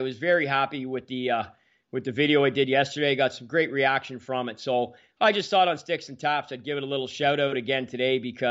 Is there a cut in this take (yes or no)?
no